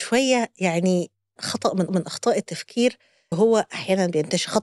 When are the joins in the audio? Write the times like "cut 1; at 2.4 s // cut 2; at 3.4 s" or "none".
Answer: cut 1; at 1.4 s // cut 2; at 1.9 s // cut 3; at 3.3 s